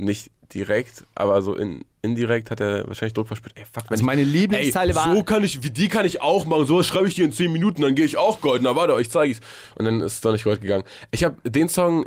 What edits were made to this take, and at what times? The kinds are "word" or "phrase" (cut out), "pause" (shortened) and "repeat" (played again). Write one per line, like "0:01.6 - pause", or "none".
none